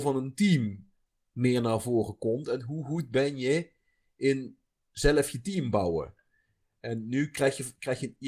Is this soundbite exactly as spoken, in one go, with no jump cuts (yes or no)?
yes